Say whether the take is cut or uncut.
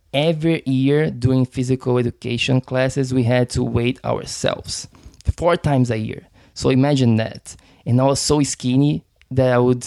uncut